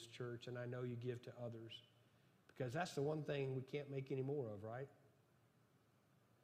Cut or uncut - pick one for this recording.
uncut